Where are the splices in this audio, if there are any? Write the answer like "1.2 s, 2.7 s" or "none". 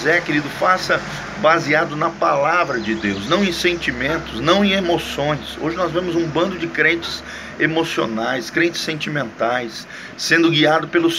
none